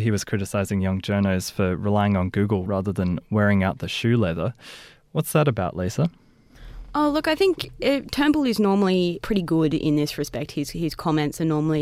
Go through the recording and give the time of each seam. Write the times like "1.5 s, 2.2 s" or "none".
9.2 s